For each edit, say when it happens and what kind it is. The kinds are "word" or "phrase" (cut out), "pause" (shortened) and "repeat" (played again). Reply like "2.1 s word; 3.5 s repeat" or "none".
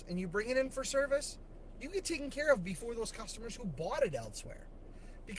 none